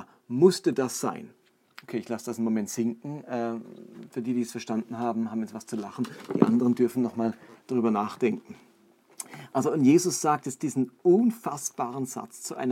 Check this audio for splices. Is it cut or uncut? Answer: cut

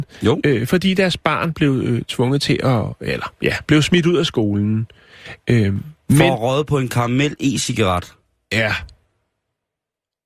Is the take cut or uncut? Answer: uncut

